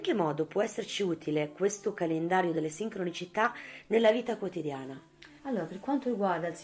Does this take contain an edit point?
yes; 1 cut; at 5.4 s

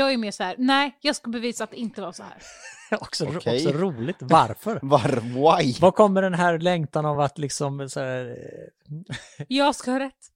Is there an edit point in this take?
no; 0 cuts

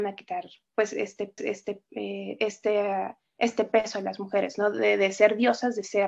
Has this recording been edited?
yes; 1 cut; at 1.4 s

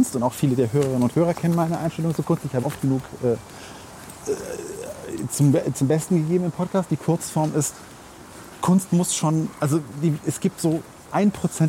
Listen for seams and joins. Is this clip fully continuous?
no; 1 cut; at 2.6 s

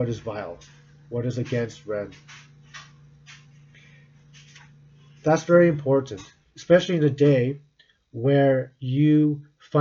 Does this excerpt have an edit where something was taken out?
no; 0 cuts

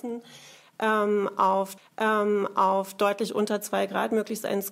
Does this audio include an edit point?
yes; 1 cut; at 1.8 s

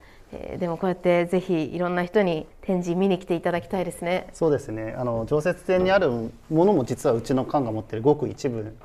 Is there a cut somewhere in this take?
yes; 1 cut; at 2.5 s

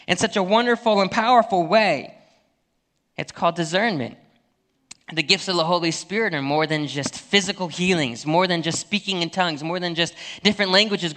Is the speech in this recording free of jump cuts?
yes; 0 cuts

